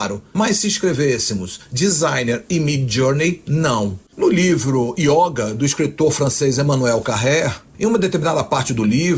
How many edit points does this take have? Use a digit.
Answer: 0